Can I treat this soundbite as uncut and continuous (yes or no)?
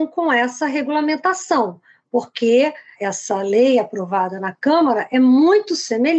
yes